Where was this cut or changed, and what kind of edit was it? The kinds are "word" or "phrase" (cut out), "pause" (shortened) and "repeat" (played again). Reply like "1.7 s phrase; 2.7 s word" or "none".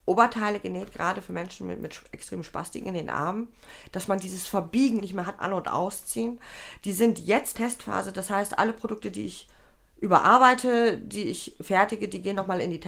5.0 s word; 5.4 s word; 7.5 s phrase; 9.7 s pause